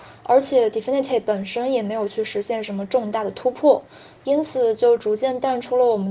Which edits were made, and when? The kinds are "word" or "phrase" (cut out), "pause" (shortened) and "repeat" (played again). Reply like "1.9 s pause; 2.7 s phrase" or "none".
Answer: none

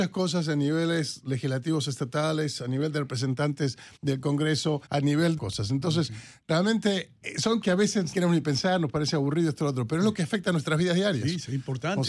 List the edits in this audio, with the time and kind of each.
4.0 s pause; 4.9 s pause; 5.4 s phrase; 7.2 s word; 7.6 s word; 8.1 s word

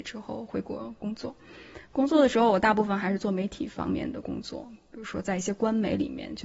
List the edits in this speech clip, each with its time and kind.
none

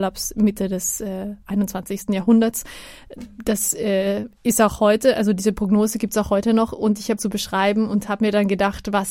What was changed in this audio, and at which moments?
1.4 s pause; 4.4 s pause; 7.2 s phrase

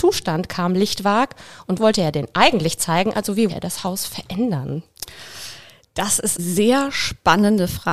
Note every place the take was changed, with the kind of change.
1.8 s word; 3.5 s word; 6.4 s word

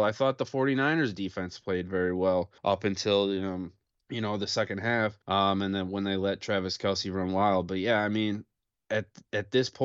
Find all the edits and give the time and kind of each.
2.6 s pause; 3.9 s pause; 5.2 s pause

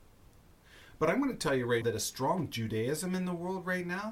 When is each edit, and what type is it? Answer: 1.8 s word

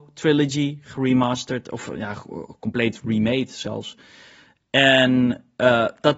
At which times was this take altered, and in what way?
none

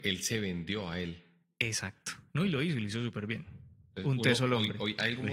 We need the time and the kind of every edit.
none

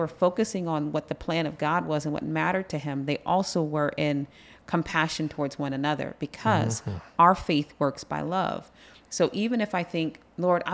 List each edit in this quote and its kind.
none

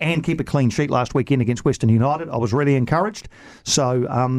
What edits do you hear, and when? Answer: none

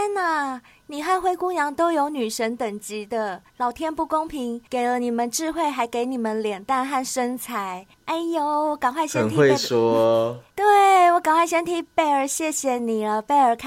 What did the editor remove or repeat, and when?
3.5 s pause; 4.7 s pause; 7.9 s pause

